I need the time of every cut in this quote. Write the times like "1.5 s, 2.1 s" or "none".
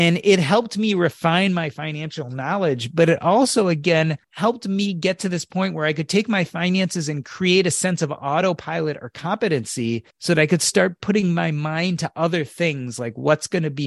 4.2 s, 10.1 s